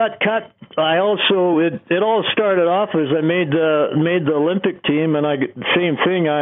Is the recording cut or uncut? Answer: uncut